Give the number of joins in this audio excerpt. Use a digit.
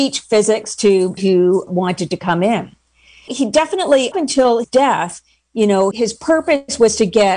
6